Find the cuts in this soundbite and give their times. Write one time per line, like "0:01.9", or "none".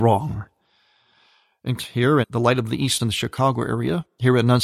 0:01.8
0:02.2
0:03.0